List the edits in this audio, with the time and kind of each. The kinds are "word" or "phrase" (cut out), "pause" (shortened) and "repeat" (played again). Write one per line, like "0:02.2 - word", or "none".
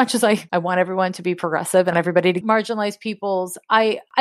0:01.9 - word
0:02.4 - phrase